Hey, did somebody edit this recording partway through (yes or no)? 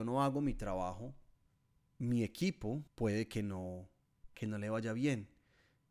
yes